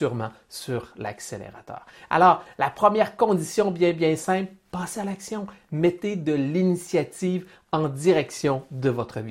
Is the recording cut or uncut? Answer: uncut